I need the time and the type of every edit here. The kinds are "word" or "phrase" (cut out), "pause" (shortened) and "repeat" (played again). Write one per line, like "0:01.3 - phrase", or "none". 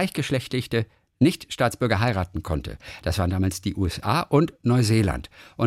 none